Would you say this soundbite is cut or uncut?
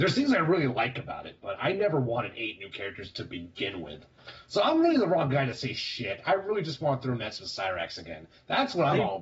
uncut